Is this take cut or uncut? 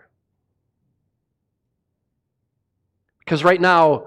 uncut